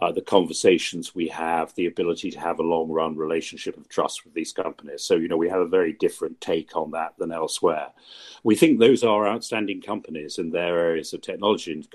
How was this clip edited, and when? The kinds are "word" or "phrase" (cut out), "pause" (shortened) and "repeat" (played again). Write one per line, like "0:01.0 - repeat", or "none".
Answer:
none

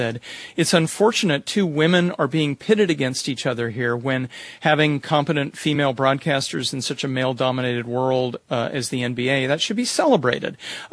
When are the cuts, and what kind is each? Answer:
none

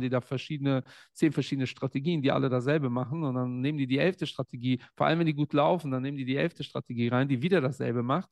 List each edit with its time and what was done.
none

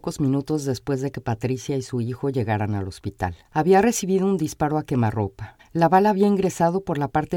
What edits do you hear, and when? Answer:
0:03.4 - pause
0:05.6 - pause

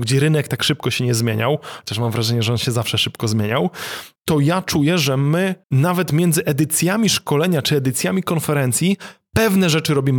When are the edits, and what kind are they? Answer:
0:04.2 - pause
0:05.6 - pause

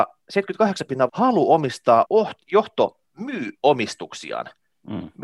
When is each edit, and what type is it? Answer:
0:01.1 - phrase
0:02.0 - phrase

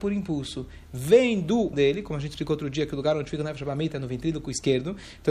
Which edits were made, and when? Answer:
0:01.7 - word

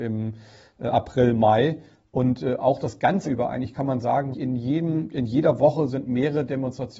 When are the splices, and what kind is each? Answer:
0:03.2 - word
0:04.3 - word

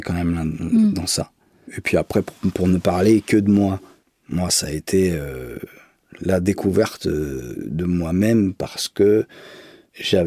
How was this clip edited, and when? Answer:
none

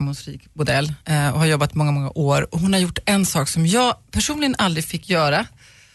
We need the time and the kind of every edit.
0:01.0 - pause

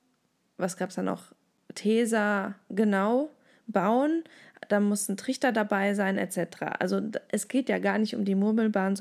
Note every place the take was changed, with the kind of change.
none

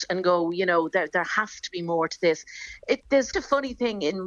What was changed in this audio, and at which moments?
0:03.3 - word

